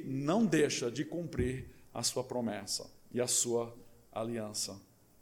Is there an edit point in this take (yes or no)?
no